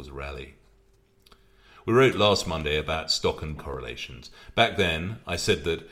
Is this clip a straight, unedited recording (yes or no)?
no